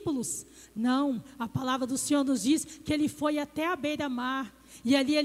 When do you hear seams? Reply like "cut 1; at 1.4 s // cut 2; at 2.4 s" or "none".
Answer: none